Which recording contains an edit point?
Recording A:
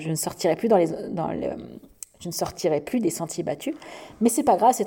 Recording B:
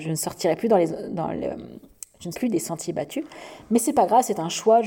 B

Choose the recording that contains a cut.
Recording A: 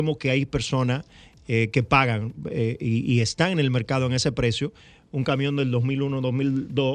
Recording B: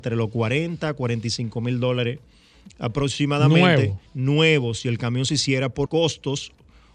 B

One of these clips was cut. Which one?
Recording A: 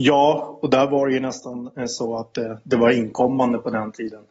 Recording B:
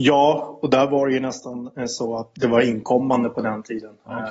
B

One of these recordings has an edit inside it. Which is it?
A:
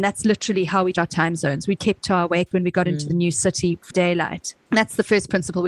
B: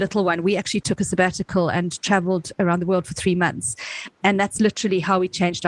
A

